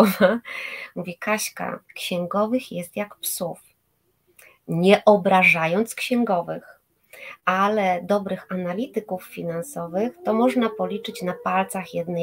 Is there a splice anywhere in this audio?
yes; 1 cut; at 1.8 s

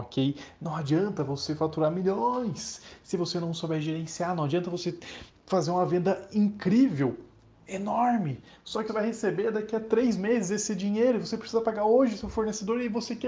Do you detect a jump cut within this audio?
yes; 1 cut; at 8.9 s

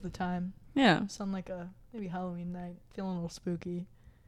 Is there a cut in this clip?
no; 0 cuts

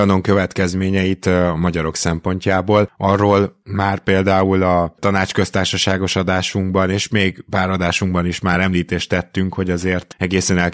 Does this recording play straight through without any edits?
yes; 0 cuts

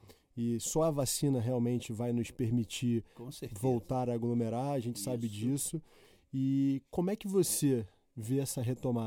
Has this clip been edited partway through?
no; 0 cuts

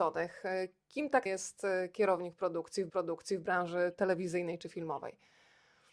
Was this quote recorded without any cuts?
no; 2 cuts; at 1.3 s, 2.9 s

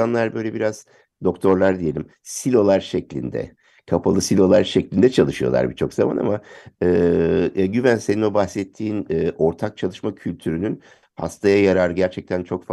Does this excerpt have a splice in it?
no; 0 cuts

